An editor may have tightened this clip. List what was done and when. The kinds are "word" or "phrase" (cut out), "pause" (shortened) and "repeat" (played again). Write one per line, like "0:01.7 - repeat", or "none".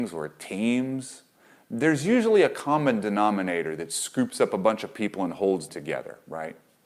0:05.7 - word